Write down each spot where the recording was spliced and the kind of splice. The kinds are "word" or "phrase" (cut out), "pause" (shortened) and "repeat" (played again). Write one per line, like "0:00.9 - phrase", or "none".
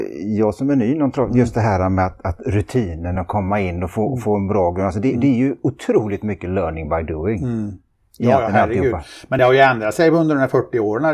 none

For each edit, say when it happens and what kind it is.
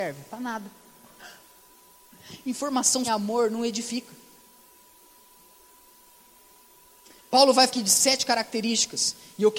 0:03.0 - word
0:07.7 - word

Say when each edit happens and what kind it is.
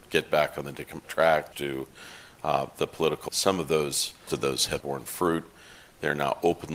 0:01.0 - word
0:01.5 - word
0:03.3 - word
0:04.3 - word
0:04.8 - word

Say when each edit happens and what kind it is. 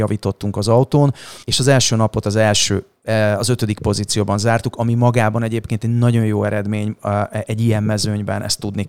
0:01.4 - pause

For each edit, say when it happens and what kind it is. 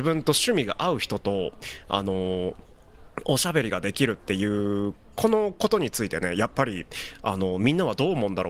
none

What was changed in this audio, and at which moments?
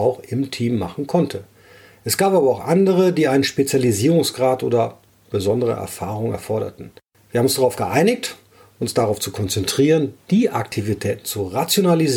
none

